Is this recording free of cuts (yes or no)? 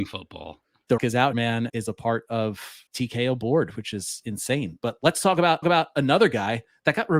no